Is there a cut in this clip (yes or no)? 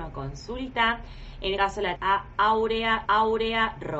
yes